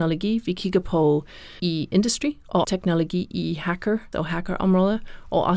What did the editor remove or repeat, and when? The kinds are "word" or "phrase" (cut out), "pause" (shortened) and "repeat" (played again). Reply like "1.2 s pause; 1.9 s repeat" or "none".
1.6 s word; 2.6 s word; 4.1 s word